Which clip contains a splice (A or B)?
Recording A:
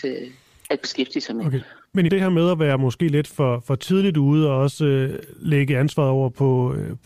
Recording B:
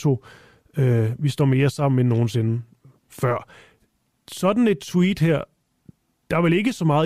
A